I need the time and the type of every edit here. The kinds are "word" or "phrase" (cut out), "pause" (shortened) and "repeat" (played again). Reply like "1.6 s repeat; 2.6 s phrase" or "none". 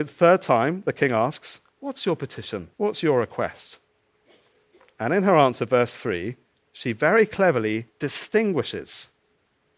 2.7 s pause; 6.5 s pause; 7.9 s pause